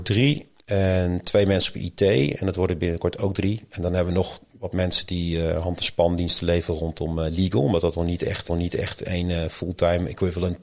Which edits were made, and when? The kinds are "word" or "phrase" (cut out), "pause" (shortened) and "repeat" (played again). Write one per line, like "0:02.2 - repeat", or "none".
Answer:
0:08.5 - repeat